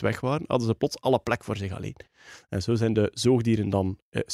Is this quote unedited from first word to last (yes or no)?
yes